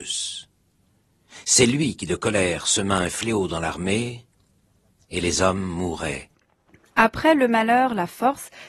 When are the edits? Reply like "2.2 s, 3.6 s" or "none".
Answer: none